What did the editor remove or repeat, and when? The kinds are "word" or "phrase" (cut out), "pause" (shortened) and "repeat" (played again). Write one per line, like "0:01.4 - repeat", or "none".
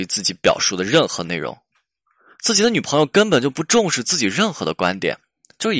none